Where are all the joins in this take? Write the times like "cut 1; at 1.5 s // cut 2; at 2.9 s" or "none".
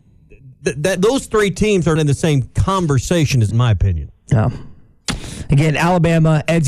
cut 1; at 1.0 s // cut 2; at 2.0 s // cut 3; at 3.5 s